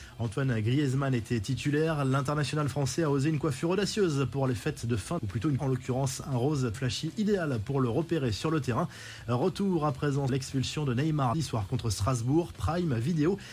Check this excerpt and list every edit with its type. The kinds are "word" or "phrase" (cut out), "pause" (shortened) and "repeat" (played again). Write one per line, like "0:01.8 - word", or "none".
0:05.2 - word
0:05.6 - word
0:06.7 - word
0:10.3 - word
0:11.3 - word